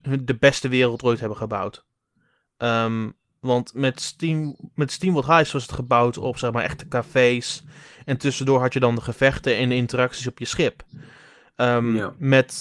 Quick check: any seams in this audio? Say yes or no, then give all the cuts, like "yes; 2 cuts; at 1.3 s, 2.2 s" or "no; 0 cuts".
no; 0 cuts